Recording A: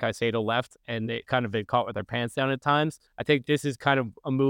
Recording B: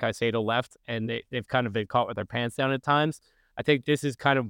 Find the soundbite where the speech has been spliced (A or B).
A